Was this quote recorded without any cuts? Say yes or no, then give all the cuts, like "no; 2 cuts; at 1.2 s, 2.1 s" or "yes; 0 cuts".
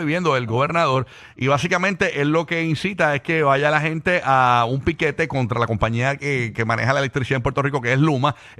yes; 0 cuts